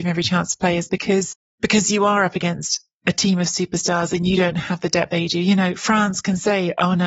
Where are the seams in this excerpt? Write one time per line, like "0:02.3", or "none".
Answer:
0:01.5
0:05.1